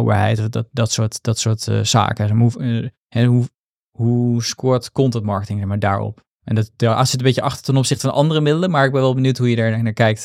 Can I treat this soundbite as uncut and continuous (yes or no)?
no